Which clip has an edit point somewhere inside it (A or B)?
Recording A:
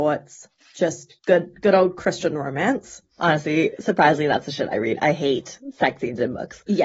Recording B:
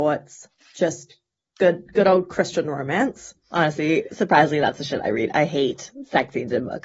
A